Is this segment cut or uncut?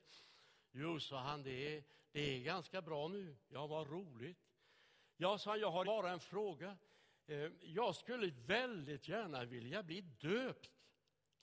cut